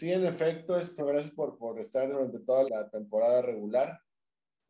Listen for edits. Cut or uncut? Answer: cut